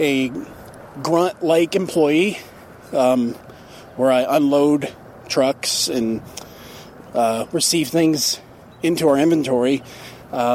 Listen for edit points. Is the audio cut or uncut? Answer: uncut